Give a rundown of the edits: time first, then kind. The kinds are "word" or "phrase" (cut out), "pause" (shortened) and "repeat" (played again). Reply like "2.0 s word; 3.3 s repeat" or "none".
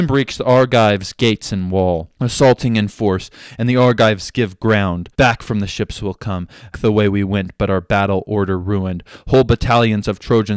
2.1 s pause; 5.1 s pause; 6.7 s word